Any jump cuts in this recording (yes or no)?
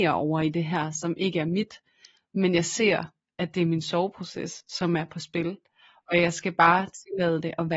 no